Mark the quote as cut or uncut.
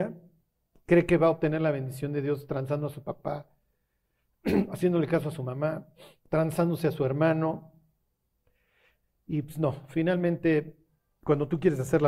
uncut